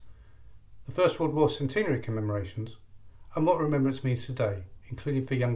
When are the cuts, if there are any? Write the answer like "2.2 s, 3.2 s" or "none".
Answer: none